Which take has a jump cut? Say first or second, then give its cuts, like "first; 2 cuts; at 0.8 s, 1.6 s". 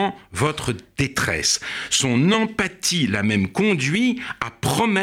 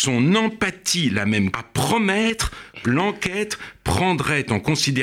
second; 2 cuts; at 1.5 s, 2.8 s